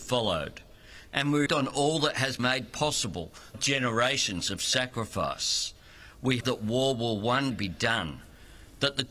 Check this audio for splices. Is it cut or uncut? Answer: cut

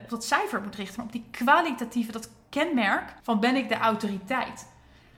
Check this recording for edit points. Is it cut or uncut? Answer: cut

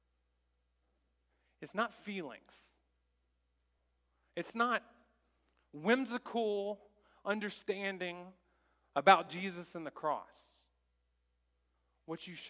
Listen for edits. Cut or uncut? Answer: uncut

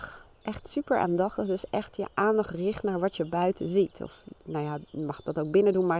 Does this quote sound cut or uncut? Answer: uncut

